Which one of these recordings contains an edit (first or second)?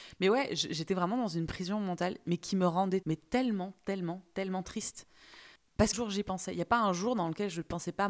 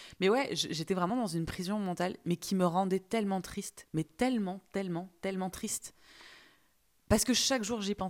first